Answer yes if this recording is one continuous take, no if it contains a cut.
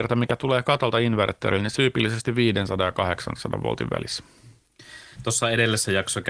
no